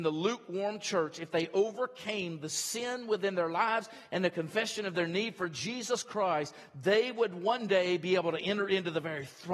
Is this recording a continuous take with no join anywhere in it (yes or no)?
yes